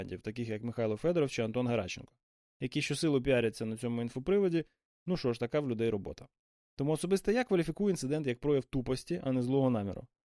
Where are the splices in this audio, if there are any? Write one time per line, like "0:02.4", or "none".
none